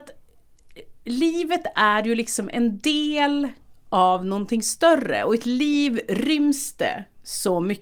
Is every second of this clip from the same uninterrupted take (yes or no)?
yes